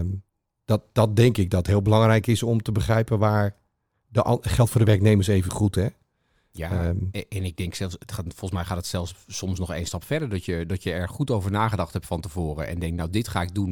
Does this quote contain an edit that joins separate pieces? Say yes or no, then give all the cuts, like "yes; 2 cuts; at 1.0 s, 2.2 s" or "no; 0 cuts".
no; 0 cuts